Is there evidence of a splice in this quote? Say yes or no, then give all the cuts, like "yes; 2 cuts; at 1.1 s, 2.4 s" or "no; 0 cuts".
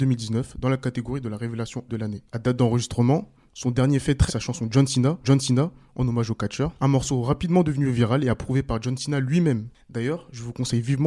yes; 5 cuts; at 1.9 s, 2.3 s, 4.3 s, 5.2 s, 6.8 s